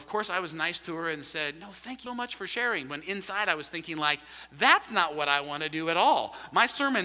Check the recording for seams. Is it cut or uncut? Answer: cut